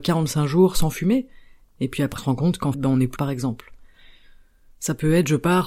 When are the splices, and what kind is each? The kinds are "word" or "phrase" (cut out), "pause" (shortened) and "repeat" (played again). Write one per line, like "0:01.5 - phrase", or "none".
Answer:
0:02.2 - word
0:02.7 - word
0:03.2 - word